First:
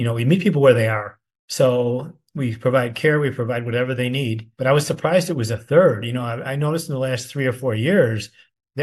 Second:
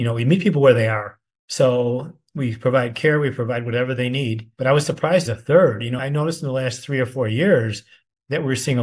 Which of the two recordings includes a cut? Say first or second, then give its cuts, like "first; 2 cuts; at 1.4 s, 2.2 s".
second; 2 cuts; at 5.3 s, 6.0 s